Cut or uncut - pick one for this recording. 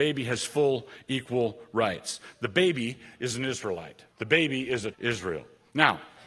cut